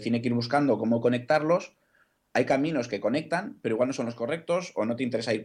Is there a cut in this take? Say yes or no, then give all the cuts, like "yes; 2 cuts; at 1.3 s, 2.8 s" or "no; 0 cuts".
no; 0 cuts